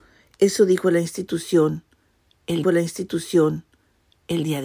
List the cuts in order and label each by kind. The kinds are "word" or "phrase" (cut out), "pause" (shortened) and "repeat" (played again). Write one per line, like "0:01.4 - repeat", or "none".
0:02.6 - repeat